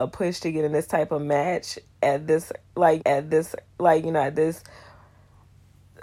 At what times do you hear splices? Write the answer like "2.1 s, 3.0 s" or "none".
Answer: 3.0 s